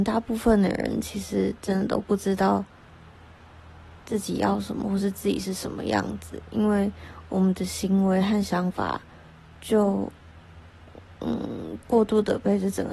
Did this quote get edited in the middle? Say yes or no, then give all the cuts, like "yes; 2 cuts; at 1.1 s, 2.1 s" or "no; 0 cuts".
no; 0 cuts